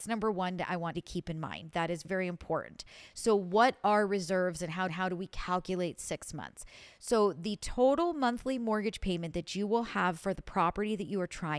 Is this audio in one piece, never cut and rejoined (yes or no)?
no